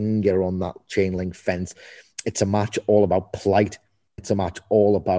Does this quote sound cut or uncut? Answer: cut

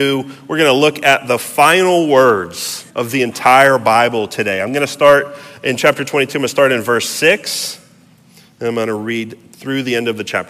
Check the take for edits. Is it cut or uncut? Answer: cut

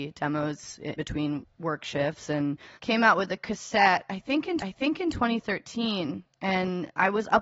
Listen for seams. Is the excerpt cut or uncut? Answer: cut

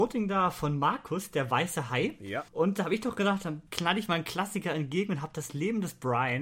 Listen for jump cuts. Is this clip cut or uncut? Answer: cut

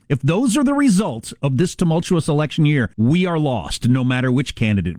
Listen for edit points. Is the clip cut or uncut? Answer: cut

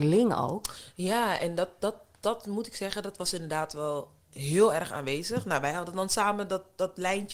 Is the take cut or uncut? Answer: uncut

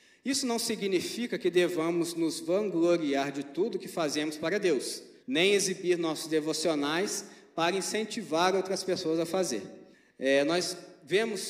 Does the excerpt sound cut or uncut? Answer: cut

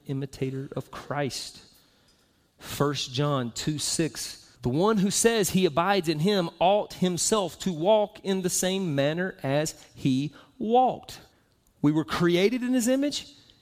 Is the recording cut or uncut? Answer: cut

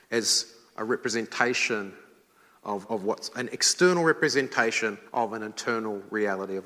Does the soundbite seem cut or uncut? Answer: cut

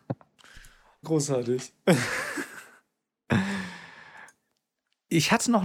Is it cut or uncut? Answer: cut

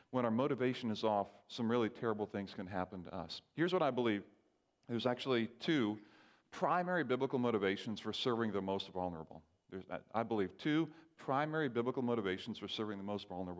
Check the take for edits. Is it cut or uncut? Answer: uncut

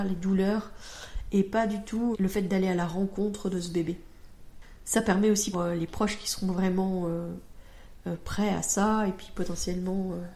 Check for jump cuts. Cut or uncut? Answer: cut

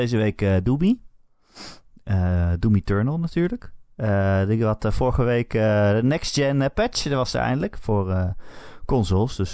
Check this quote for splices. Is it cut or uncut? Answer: uncut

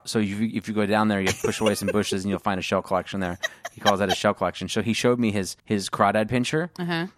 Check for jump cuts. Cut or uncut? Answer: cut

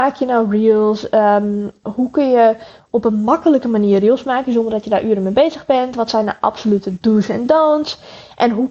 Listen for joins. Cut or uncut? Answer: uncut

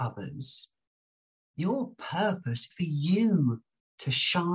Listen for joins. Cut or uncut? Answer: cut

